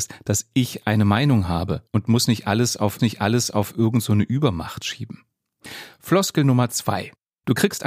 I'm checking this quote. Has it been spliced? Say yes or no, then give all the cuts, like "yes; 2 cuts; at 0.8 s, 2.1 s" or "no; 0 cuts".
yes; 2 cuts; at 1.9 s, 3.0 s